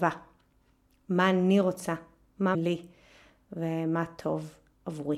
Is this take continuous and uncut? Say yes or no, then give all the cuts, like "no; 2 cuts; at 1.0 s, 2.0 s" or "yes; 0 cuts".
no; 1 cut; at 2.5 s